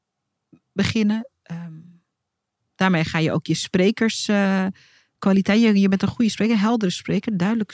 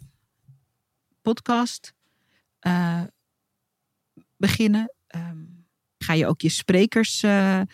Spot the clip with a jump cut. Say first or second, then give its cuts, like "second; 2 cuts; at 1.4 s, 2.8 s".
second; 1 cut; at 6.0 s